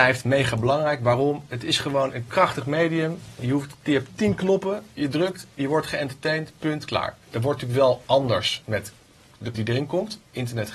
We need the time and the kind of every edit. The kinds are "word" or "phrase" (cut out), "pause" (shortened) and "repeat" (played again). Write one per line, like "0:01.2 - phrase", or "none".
0:04.1 - word
0:09.5 - word